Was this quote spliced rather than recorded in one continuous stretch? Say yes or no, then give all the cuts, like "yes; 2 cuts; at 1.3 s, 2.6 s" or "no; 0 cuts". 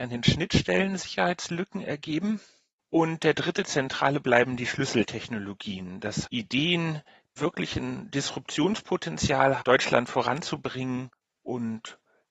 yes; 4 cuts; at 4.2 s, 6.2 s, 7.4 s, 9.6 s